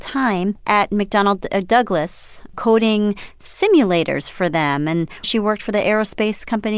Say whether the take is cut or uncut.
cut